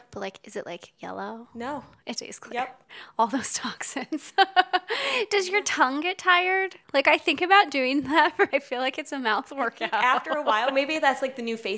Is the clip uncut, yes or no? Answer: no